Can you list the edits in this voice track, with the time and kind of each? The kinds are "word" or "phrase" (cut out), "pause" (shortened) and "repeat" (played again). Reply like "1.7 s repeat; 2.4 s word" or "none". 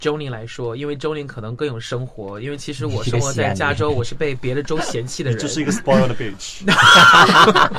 none